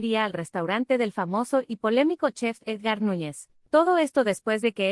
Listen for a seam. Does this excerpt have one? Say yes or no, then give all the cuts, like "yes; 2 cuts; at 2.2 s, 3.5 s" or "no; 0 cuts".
yes; 1 cut; at 3.6 s